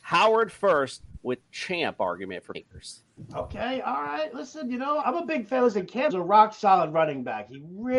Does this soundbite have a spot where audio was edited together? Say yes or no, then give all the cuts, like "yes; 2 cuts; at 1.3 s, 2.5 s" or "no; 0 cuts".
yes; 4 cuts; at 1.4 s, 2.5 s, 5.0 s, 6.1 s